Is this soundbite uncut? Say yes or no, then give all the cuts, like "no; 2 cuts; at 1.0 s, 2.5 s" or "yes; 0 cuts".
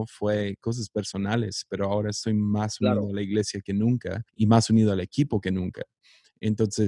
no; 1 cut; at 4.3 s